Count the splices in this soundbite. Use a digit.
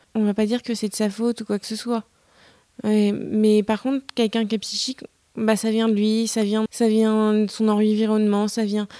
1